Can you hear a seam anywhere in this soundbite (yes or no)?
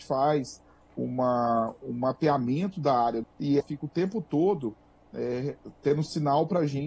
yes